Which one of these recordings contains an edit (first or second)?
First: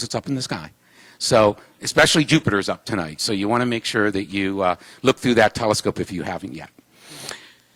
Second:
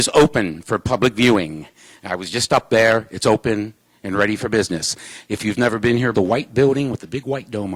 second